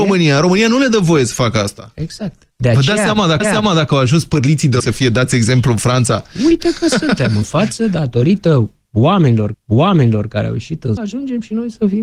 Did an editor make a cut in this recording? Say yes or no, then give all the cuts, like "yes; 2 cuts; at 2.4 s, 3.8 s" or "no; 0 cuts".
yes; 6 cuts; at 2.5 s, 3.4 s, 4.8 s, 7.4 s, 9.5 s, 11.0 s